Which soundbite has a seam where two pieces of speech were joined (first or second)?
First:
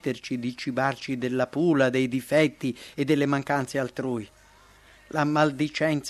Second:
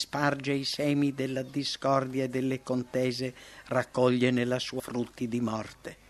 second